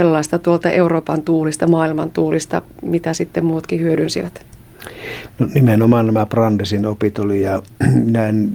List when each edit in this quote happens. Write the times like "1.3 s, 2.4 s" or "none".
none

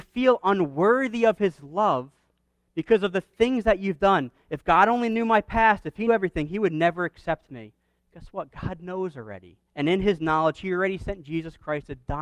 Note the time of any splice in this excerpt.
6.1 s, 9.7 s

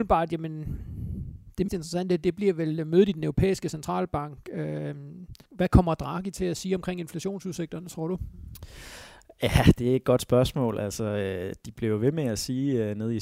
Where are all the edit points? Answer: 1.7 s, 5.5 s

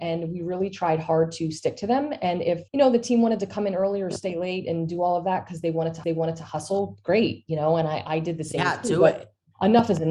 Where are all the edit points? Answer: 2.7 s, 6.0 s

